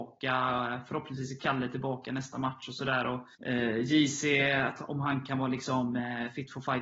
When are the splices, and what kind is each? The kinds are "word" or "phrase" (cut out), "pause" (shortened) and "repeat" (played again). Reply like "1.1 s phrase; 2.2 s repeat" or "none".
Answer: 3.3 s pause